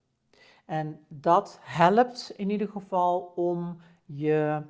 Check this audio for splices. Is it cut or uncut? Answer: uncut